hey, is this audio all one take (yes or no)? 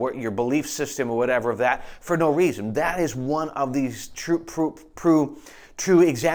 yes